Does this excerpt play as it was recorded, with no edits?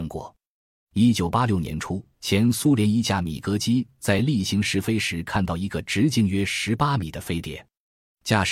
no; 1 cut; at 2.1 s

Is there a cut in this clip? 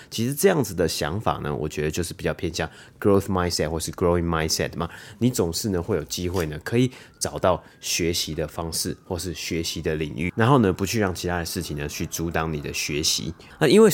no; 0 cuts

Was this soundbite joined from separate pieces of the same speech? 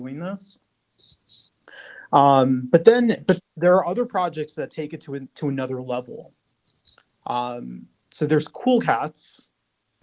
yes; 1 cut; at 3.4 s

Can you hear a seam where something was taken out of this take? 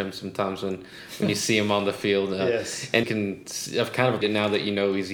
yes; 2 cuts; at 3.0 s, 4.2 s

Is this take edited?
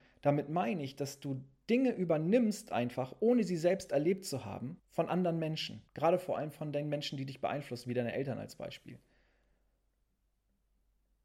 yes; 2 cuts; at 4.8 s, 5.9 s

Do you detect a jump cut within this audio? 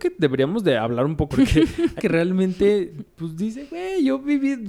yes; 2 cuts; at 1.3 s, 2.0 s

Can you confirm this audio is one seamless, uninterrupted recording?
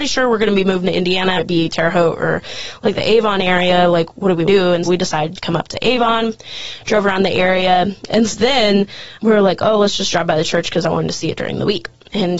no; 6 cuts; at 1.4 s, 4.5 s, 4.9 s, 5.4 s, 8.3 s, 9.2 s

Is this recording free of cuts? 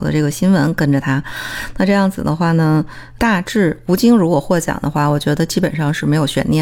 no; 1 cut; at 3.2 s

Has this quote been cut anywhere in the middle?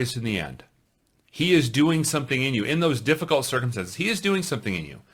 no; 0 cuts

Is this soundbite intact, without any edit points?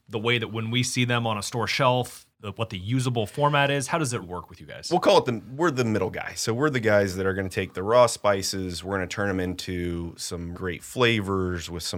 no; 3 cuts; at 2.3 s, 4.2 s, 10.5 s

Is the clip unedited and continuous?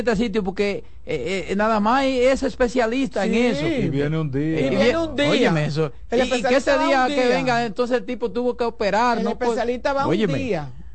yes; 0 cuts

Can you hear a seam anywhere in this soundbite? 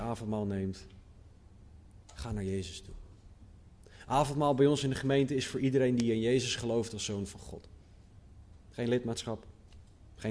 no; 0 cuts

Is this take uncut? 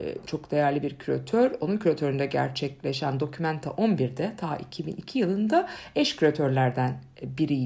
yes; 0 cuts

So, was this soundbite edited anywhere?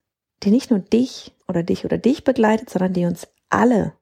yes; 1 cut; at 1.4 s

